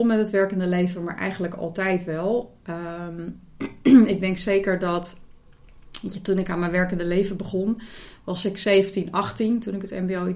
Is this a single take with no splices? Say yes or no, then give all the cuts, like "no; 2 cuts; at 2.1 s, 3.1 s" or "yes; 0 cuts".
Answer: yes; 0 cuts